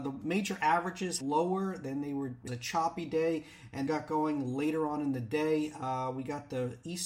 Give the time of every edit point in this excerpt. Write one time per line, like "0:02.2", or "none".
0:01.2
0:02.5
0:03.9